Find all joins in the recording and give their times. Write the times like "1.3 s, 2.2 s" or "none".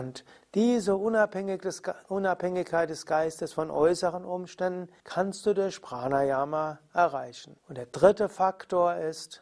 5.0 s, 7.6 s